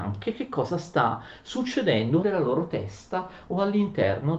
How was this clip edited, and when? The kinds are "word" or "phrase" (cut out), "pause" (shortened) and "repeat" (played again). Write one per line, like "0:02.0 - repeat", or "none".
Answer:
0:02.2 - word